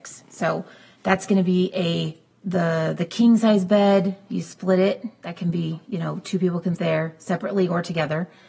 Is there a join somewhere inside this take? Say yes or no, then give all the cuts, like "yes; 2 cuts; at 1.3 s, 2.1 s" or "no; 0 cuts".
yes; 2 cuts; at 2.3 s, 6.8 s